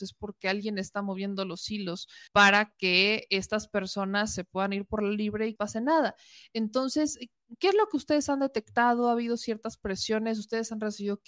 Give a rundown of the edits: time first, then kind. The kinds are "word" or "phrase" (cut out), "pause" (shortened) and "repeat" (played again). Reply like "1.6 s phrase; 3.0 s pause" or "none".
2.3 s pause; 5.6 s phrase